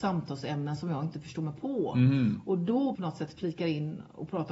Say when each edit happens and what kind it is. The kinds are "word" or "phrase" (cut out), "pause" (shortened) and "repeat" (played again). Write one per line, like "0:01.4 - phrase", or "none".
0:02.9 - phrase